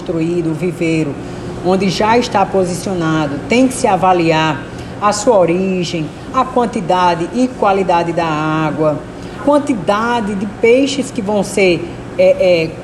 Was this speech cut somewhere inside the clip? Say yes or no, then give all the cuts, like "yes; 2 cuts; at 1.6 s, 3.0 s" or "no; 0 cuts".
yes; 1 cut; at 9.4 s